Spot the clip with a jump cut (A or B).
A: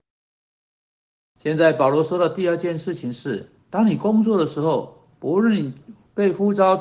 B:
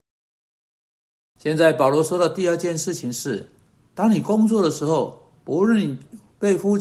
A